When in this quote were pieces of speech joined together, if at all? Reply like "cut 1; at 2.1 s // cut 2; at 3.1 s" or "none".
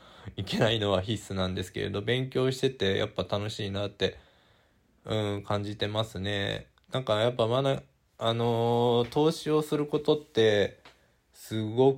none